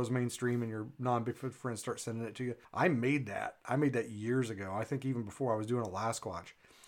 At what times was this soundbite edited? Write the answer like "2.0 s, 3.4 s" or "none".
2.6 s